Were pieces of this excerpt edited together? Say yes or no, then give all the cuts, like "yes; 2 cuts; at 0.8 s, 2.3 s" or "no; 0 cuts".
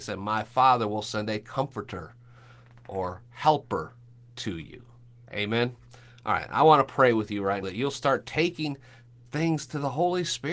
yes; 2 cuts; at 7.6 s, 9.3 s